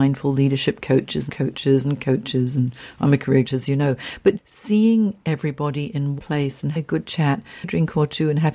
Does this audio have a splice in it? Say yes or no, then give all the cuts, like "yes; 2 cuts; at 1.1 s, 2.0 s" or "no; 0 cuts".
yes; 7 cuts; at 1.3 s, 2.0 s, 3.4 s, 4.4 s, 6.2 s, 6.8 s, 7.6 s